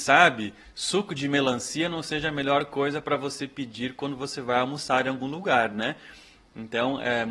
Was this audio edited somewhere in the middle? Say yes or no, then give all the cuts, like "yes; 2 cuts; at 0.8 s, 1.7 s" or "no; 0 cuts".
no; 0 cuts